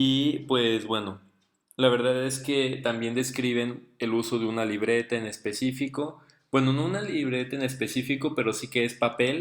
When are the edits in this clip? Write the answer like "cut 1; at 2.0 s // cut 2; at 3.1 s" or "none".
none